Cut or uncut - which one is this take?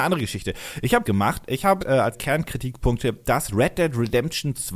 cut